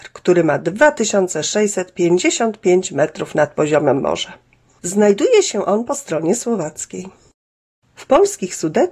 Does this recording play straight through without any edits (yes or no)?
yes